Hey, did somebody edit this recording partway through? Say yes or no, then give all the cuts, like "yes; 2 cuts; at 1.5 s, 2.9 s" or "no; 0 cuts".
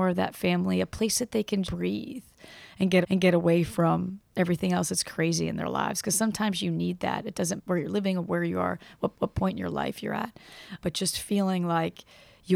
yes; 5 cuts; at 1.6 s, 3.0 s, 7.6 s, 9.1 s, 10.8 s